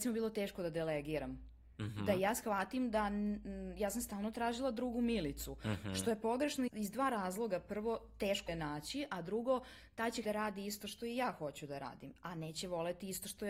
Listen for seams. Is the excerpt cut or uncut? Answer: cut